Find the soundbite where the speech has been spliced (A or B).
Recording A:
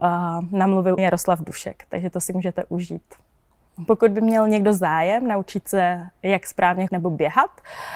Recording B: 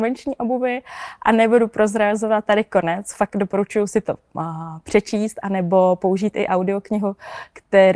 A